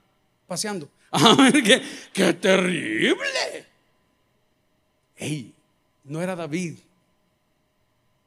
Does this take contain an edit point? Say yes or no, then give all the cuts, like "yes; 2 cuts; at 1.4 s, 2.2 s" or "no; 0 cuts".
no; 0 cuts